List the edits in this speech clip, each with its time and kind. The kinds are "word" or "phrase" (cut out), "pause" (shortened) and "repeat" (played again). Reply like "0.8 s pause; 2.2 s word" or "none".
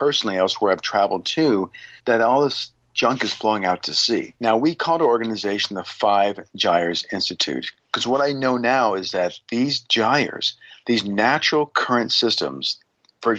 2.0 s pause; 4.4 s pause